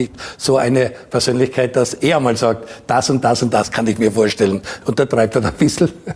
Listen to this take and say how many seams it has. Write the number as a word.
zero